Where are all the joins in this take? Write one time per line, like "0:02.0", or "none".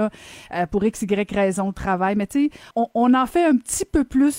0:02.7